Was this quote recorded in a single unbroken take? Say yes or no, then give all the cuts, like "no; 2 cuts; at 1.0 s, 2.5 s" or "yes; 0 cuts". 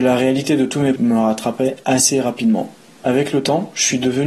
no; 1 cut; at 1.0 s